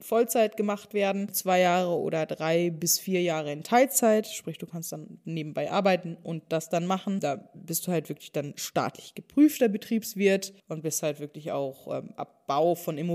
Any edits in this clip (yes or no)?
yes